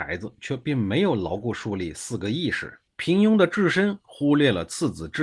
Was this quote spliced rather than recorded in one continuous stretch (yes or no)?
yes